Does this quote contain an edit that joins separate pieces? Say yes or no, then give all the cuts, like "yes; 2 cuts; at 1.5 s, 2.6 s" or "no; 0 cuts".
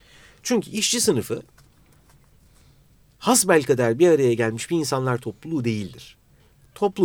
no; 0 cuts